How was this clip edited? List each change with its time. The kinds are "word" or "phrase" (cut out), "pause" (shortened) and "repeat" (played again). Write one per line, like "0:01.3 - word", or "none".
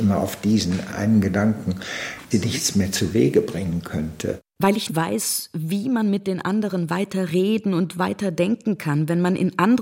0:02.3 - phrase
0:04.5 - pause
0:04.9 - word